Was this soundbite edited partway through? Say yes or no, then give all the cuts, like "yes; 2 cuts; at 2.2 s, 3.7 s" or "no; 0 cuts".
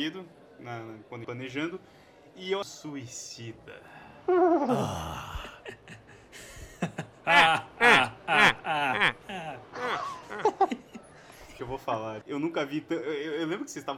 yes; 4 cuts; at 1.2 s, 2.6 s, 11.6 s, 12.2 s